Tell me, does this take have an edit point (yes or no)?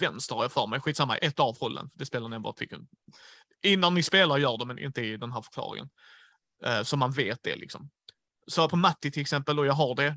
yes